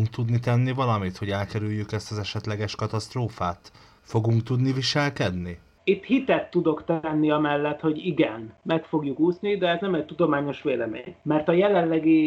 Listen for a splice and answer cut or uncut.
uncut